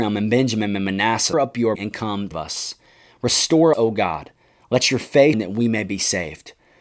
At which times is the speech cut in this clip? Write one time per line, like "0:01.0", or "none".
0:01.3
0:01.8
0:02.3
0:03.7
0:05.3